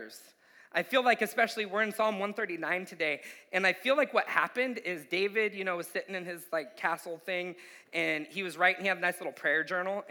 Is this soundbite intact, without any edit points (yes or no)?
yes